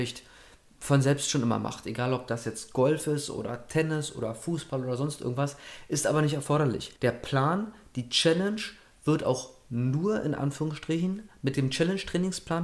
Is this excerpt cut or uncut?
cut